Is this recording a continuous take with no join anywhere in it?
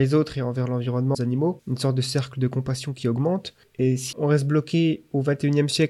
no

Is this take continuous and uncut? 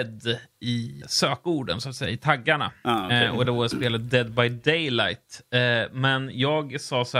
no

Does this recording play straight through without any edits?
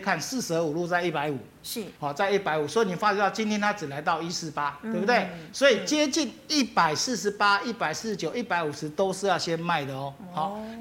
no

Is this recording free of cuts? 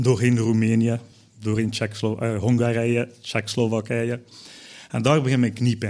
yes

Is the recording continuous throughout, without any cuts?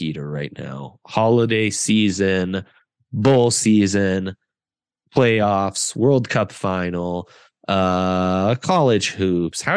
yes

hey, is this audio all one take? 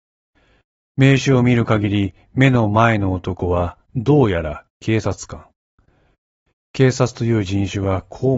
yes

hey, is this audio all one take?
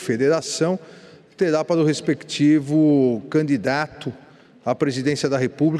yes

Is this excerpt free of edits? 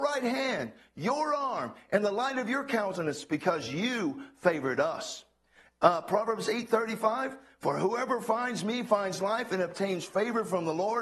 yes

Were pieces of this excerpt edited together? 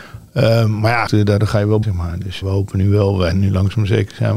yes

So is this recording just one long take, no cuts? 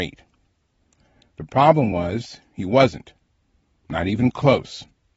yes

